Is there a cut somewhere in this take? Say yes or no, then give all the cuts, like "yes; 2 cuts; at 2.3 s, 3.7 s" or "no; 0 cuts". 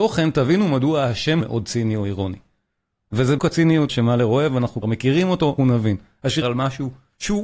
yes; 6 cuts; at 1.4 s, 3.4 s, 3.9 s, 4.8 s, 5.6 s, 6.4 s